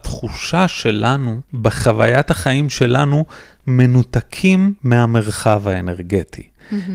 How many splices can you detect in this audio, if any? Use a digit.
2